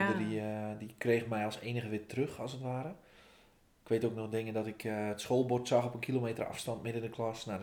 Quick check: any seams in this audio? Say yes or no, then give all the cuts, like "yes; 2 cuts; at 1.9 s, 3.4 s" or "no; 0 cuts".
no; 0 cuts